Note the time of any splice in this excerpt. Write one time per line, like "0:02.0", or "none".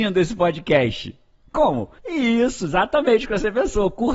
0:02.0